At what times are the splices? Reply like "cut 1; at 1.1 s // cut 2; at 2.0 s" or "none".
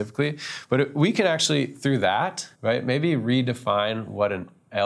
cut 1; at 2.5 s